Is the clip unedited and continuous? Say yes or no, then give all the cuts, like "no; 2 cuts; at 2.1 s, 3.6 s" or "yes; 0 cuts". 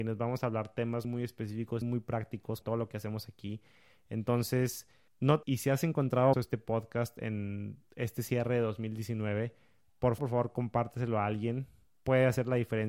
no; 6 cuts; at 1.0 s, 1.8 s, 2.6 s, 5.4 s, 6.3 s, 10.2 s